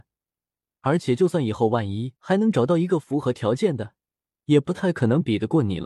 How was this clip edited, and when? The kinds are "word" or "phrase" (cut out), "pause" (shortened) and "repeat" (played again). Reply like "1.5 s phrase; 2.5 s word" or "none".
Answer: 2.2 s pause